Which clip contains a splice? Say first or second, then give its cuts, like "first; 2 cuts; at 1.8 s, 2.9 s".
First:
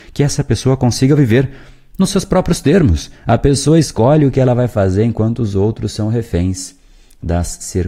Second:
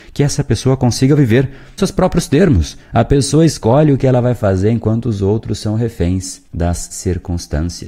second; 2 cuts; at 1.8 s, 6.5 s